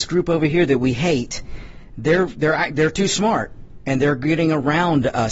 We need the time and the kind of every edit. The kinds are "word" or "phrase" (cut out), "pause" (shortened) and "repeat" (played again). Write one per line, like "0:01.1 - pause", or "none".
none

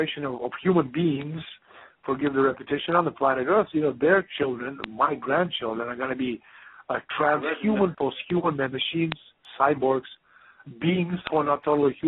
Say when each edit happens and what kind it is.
none

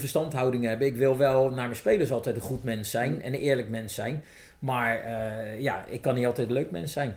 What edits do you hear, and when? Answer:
none

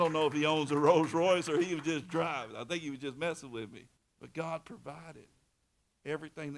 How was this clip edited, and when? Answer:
0:04.0 - pause

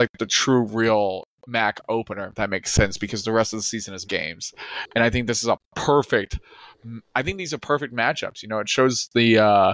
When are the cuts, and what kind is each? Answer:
0:04.0 - word

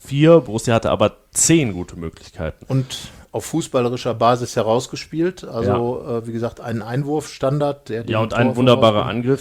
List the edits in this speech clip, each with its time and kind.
none

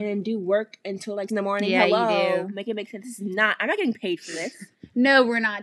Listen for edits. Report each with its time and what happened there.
0:01.3 - word

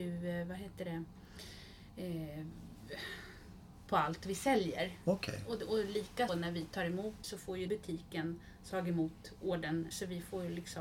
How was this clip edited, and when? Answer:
0:03.9 - word
0:06.3 - word
0:07.2 - word
0:07.7 - word
0:08.7 - word
0:09.9 - word

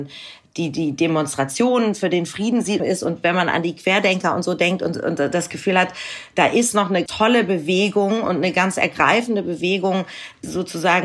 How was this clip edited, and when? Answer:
0:02.8 - phrase
0:07.1 - word

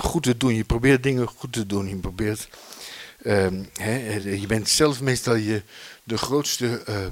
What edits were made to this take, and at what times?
none

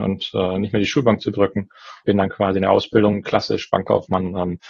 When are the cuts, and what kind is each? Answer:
0:02.0 - word

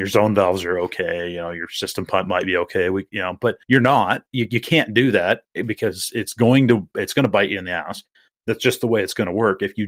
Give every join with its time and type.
0:03.6 - pause

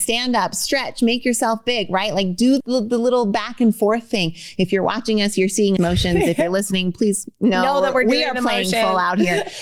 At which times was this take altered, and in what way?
0:02.6 - word
0:05.8 - phrase

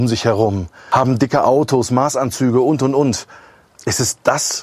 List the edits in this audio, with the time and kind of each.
none

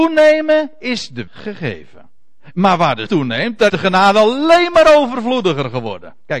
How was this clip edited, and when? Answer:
0:01.3 - word
0:03.1 - word
0:03.7 - word

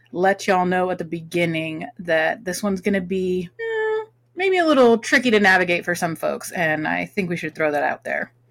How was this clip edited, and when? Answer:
0:03.5 - pause

